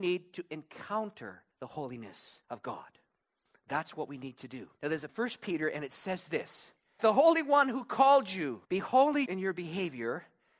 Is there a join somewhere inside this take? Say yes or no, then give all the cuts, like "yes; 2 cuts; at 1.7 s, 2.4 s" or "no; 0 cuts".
yes; 7 cuts; at 1.5 s, 2.4 s, 4.7 s, 5.1 s, 7.0 s, 8.6 s, 9.3 s